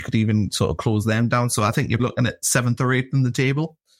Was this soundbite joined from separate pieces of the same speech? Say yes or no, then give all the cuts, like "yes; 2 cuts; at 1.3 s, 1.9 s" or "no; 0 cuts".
yes; 1 cut; at 2.0 s